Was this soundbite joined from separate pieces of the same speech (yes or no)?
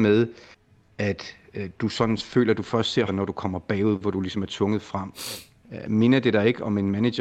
yes